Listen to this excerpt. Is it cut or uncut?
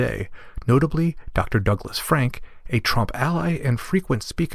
uncut